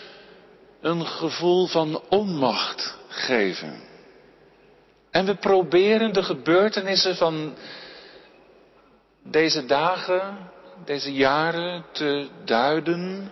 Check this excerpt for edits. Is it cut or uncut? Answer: uncut